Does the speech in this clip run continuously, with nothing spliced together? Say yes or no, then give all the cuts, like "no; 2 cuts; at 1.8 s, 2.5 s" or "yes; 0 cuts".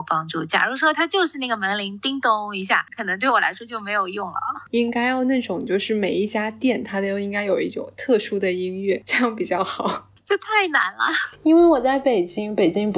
yes; 0 cuts